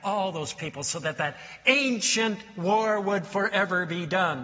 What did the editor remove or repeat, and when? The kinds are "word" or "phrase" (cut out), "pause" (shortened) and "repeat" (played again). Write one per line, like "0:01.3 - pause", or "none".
none